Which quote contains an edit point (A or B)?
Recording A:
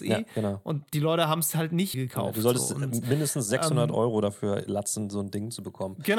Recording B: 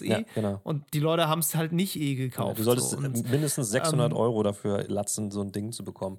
A